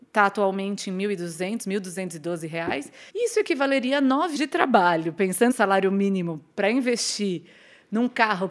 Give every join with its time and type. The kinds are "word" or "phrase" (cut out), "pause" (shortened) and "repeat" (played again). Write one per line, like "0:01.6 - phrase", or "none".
0:03.1 - pause
0:04.4 - word
0:05.5 - word